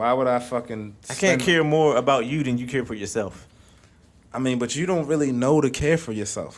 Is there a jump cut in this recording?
no; 0 cuts

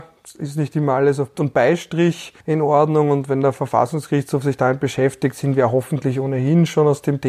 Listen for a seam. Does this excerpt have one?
yes; 2 cuts; at 1.3 s, 2.4 s

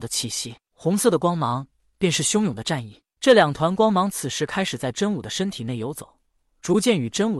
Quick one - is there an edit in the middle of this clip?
no; 0 cuts

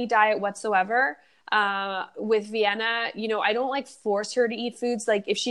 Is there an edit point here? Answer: no; 0 cuts

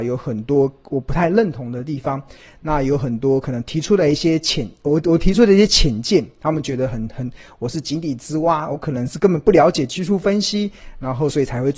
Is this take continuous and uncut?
yes; 0 cuts

